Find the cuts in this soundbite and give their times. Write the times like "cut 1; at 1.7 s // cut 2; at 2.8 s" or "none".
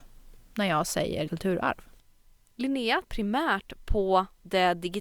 cut 1; at 1.3 s // cut 2; at 3.0 s